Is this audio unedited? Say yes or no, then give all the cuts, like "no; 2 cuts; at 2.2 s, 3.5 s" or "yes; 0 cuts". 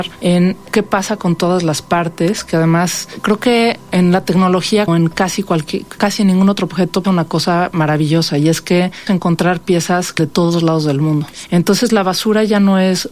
no; 5 cuts; at 4.9 s, 6.0 s, 7.0 s, 9.1 s, 10.2 s